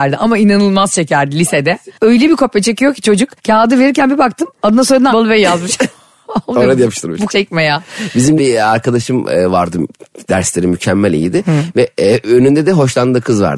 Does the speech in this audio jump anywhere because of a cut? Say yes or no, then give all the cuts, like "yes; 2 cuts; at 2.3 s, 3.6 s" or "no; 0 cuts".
yes; 4 cuts; at 3.4 s, 5.1 s, 7.3 s, 8.4 s